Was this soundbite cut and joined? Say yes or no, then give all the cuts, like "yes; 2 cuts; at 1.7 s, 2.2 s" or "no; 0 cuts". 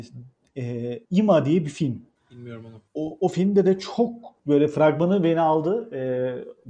yes; 4 cuts; at 1.0 s, 2.2 s, 2.9 s, 4.4 s